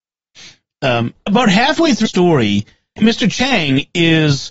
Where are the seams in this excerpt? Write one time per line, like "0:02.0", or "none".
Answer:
0:01.3
0:02.1
0:03.0